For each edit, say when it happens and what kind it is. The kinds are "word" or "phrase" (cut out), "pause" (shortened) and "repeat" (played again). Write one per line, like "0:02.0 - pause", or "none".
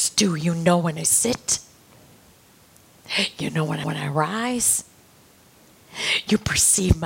0:03.8 - repeat